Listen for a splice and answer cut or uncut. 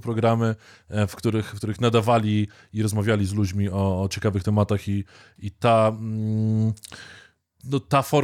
uncut